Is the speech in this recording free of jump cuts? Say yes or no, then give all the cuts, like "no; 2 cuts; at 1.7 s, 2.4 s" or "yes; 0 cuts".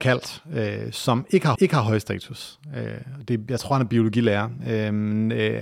no; 1 cut; at 1.6 s